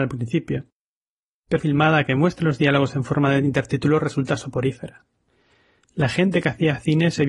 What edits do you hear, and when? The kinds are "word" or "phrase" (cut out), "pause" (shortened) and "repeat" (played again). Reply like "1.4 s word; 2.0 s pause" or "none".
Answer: 1.6 s phrase